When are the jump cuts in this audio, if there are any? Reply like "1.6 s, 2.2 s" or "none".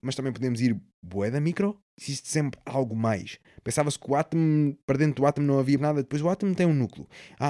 5.8 s